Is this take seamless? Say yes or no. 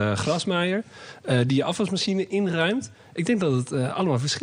yes